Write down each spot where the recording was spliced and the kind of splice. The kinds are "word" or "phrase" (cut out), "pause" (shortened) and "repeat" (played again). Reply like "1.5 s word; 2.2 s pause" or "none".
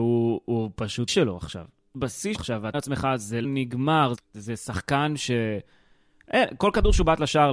1.1 s word; 1.9 s word; 2.3 s word; 2.7 s word; 3.4 s word; 4.1 s word